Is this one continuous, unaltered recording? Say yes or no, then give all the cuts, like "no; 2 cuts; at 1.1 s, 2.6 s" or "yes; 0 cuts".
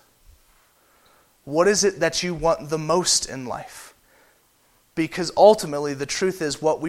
yes; 0 cuts